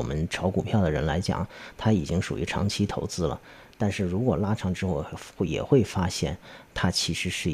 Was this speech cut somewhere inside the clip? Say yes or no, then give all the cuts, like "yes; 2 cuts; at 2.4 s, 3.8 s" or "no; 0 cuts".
no; 0 cuts